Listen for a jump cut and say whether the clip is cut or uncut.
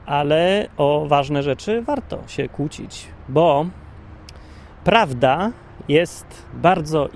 uncut